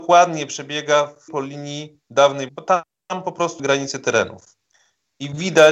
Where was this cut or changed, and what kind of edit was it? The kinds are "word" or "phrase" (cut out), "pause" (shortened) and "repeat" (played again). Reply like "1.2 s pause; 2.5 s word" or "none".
1.3 s word; 2.5 s word; 3.6 s word